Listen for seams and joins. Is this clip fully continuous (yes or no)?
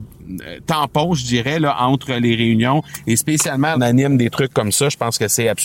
no